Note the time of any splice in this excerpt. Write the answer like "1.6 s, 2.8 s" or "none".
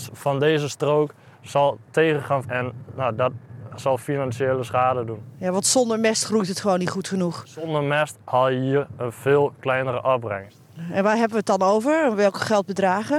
2.4 s